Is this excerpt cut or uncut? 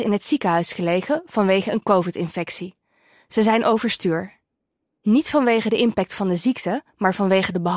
uncut